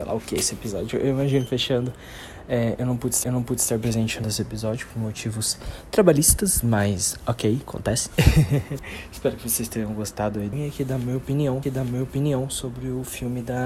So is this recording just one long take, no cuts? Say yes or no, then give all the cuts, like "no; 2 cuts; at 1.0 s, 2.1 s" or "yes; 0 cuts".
no; 5 cuts; at 1.5 s, 3.2 s, 4.2 s, 10.5 s, 11.6 s